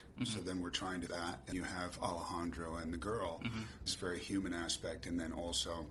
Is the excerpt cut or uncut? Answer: cut